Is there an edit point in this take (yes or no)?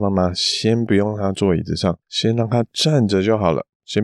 yes